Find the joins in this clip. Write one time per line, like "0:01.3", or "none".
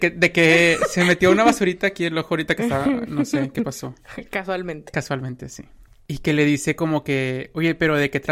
none

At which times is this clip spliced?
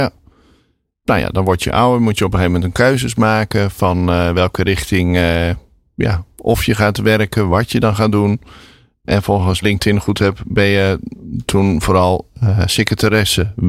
0:09.6

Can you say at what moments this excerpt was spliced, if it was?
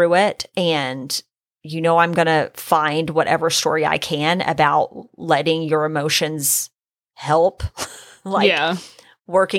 none

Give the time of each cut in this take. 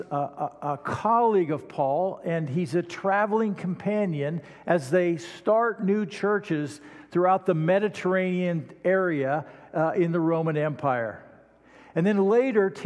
none

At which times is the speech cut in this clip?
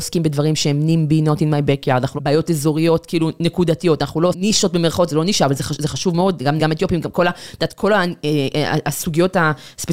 0:02.2
0:04.3
0:06.6

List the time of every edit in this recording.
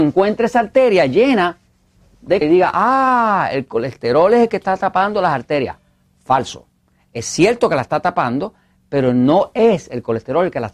0:02.4

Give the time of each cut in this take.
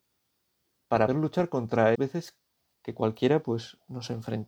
0:01.1
0:01.9
0:02.7

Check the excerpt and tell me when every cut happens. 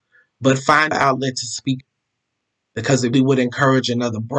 0:00.9
0:01.8
0:03.1

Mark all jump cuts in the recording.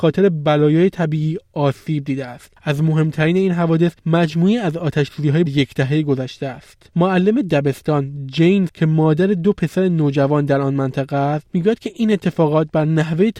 0:05.5
0:08.7

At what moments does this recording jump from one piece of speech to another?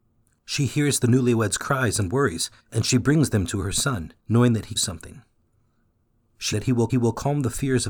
0:02.6
0:04.2
0:04.8
0:06.5
0:06.9

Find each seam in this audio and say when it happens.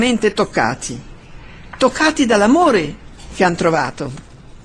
none

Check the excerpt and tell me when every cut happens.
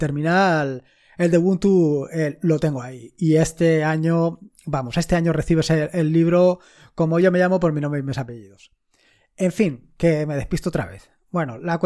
none

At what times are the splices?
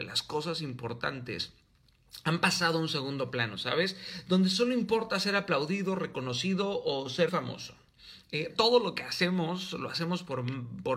0:07.3
0:08.5

